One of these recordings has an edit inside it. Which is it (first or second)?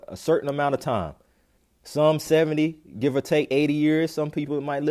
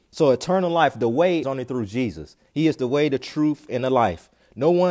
second